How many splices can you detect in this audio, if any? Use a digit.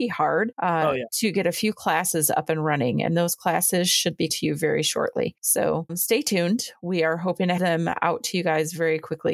3